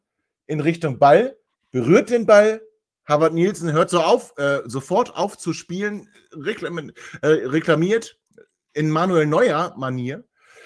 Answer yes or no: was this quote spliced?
no